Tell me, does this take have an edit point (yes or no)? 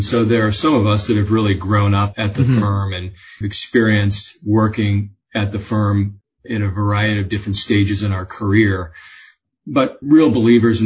no